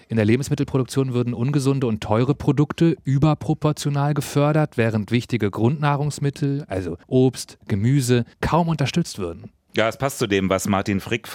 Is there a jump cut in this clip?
yes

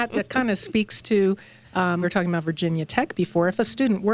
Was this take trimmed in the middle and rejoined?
yes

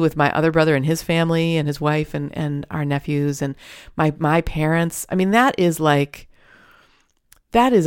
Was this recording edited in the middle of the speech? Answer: no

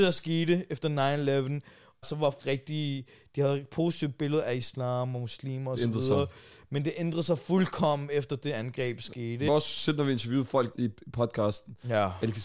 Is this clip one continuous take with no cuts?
no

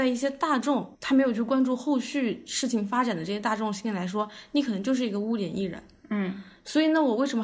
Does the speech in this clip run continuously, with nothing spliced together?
no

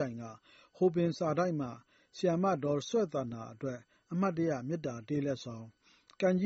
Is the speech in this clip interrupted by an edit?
no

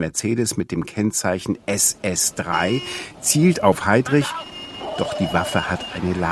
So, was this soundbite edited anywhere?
no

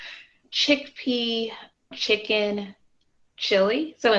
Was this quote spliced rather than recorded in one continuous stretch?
yes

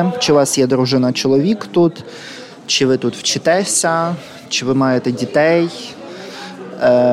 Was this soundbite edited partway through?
no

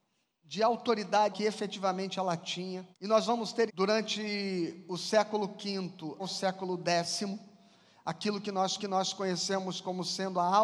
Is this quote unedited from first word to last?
no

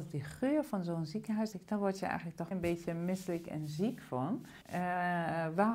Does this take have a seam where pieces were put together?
yes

